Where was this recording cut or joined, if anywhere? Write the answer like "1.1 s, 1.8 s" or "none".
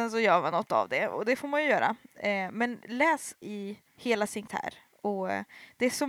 3.4 s, 3.9 s, 4.5 s